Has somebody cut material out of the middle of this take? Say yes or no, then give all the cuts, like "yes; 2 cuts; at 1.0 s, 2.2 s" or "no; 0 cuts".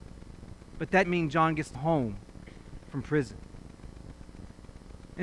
yes; 3 cuts; at 1.0 s, 1.7 s, 2.9 s